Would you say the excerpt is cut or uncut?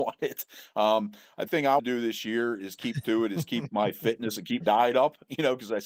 cut